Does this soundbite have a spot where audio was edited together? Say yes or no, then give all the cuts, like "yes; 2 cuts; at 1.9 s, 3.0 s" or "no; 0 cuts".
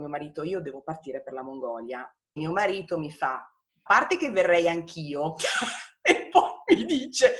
yes; 2 cuts; at 2.4 s, 3.9 s